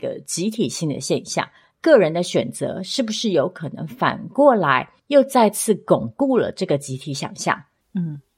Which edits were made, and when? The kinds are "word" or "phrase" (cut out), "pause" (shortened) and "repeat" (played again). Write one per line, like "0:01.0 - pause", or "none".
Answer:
0:01.6 - pause
0:05.0 - pause